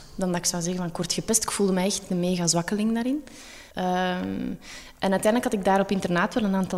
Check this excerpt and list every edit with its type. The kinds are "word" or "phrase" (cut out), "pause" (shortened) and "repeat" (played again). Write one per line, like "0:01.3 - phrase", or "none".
0:03.7 - pause